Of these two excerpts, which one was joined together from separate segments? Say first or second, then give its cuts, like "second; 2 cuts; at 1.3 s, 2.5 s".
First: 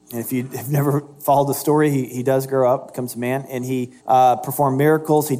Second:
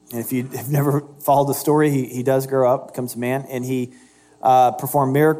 first; 1 cut; at 4.0 s